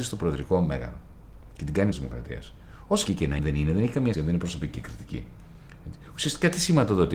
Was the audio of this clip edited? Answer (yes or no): yes